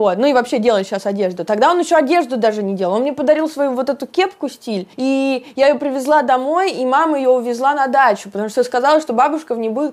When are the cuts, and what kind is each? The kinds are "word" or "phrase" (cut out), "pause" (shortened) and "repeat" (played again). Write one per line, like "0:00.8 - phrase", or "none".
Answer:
0:04.9 - pause